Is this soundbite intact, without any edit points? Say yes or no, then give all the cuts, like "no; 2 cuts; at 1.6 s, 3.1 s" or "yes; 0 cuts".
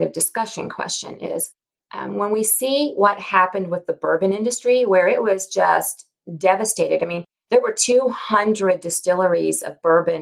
yes; 0 cuts